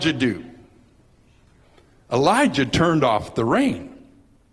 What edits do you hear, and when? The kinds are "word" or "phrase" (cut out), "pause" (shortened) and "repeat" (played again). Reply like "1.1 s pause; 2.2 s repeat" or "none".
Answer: none